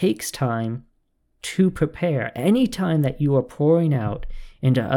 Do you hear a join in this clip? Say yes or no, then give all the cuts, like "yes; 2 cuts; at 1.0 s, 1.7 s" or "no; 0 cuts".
no; 0 cuts